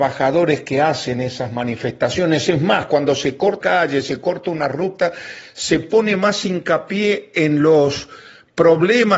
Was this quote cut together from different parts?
yes; 1 cut; at 3.6 s

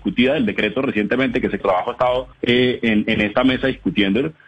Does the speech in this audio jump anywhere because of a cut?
yes; 2 cuts; at 1.6 s, 2.3 s

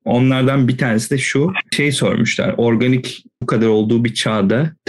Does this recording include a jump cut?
yes; 1 cut; at 3.4 s

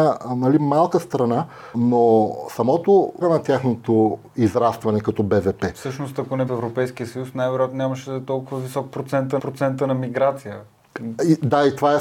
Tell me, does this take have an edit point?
yes; 4 cuts; at 1.7 s, 3.2 s, 6.5 s, 9.4 s

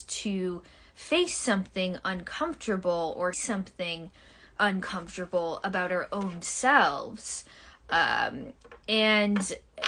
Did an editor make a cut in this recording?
yes; 2 cuts; at 3.3 s, 4.6 s

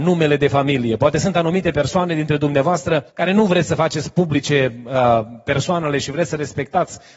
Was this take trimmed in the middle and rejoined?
yes; 1 cut; at 3.1 s

